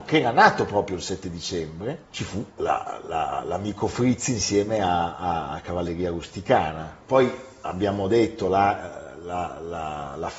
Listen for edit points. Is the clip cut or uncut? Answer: cut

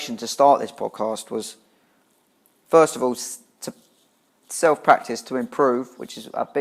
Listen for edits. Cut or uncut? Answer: uncut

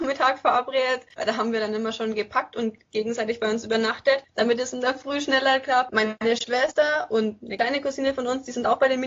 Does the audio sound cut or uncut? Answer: uncut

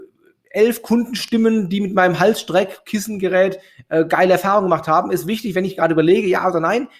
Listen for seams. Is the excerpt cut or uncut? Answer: uncut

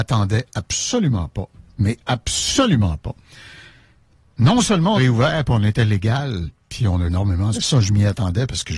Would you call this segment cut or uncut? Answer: cut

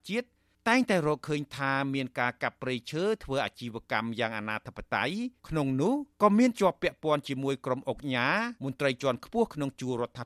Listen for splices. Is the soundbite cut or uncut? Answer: cut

